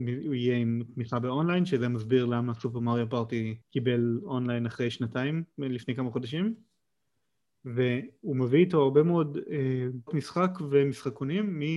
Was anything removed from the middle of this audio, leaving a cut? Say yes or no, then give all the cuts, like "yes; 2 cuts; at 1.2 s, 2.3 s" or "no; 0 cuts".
yes; 2 cuts; at 3.6 s, 10.1 s